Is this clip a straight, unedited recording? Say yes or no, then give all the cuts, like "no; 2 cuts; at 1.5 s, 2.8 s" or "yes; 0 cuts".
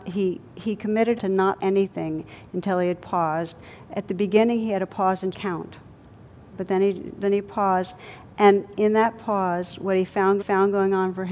no; 4 cuts; at 1.2 s, 1.6 s, 5.3 s, 10.4 s